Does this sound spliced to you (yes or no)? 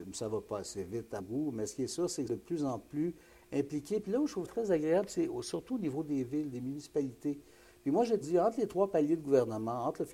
yes